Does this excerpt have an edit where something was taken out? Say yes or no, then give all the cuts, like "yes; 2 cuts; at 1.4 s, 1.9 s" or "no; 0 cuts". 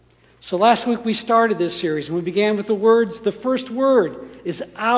no; 0 cuts